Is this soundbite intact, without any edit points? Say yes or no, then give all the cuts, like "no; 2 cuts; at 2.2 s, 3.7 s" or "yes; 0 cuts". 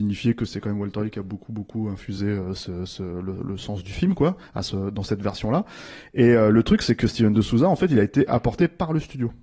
yes; 0 cuts